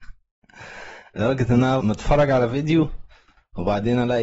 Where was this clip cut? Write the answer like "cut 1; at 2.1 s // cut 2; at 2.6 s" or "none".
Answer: cut 1; at 1.8 s

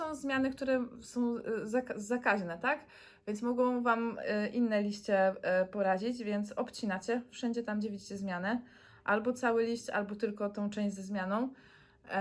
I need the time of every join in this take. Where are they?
none

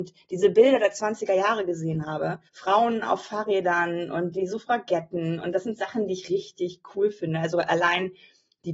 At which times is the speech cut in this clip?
cut 1; at 2.5 s

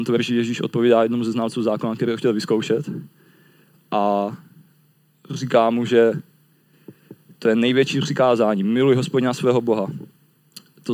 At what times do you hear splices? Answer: none

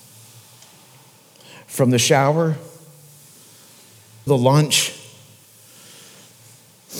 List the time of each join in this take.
cut 1; at 4.3 s

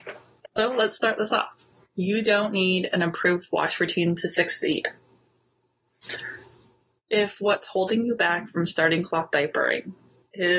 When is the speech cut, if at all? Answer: none

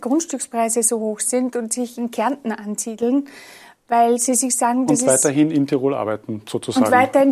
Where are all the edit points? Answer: none

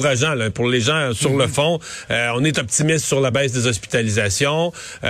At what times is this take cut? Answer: none

